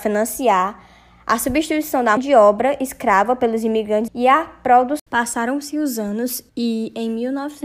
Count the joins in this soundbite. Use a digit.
4